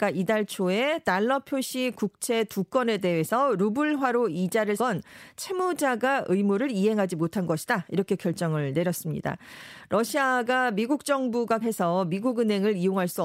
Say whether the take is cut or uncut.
cut